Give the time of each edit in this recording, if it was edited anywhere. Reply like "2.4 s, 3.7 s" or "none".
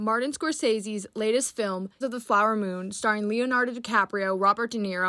2.0 s